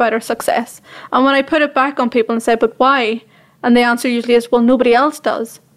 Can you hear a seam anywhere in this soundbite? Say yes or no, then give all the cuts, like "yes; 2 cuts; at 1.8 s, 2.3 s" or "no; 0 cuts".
no; 0 cuts